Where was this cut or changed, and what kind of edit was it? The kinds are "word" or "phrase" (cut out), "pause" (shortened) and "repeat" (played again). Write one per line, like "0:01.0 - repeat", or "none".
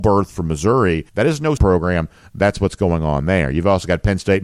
0:01.1 - pause
0:01.6 - phrase